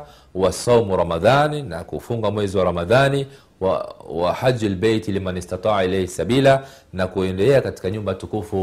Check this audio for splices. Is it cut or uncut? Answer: uncut